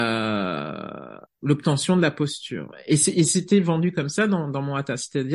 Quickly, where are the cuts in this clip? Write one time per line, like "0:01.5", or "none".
0:01.3